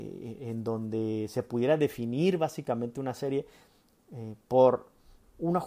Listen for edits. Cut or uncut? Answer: uncut